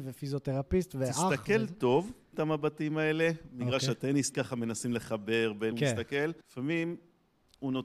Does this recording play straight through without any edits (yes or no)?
no